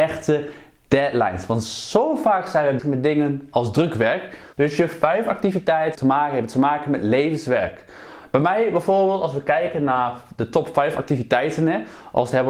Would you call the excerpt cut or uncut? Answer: cut